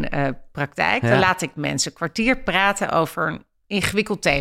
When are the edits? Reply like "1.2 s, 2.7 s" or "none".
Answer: none